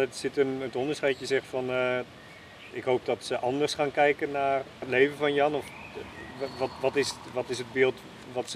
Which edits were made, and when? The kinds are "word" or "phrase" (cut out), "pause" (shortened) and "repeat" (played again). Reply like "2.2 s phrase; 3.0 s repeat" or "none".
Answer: 2.7 s word; 4.8 s phrase